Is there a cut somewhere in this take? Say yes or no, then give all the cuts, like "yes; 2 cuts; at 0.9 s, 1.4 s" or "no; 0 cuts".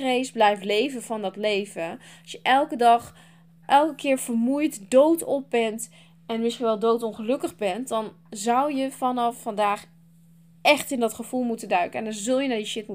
yes; 1 cut; at 3.6 s